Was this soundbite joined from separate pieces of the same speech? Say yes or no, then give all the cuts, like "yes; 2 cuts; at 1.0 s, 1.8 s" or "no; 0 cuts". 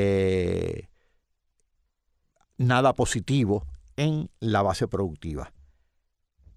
no; 0 cuts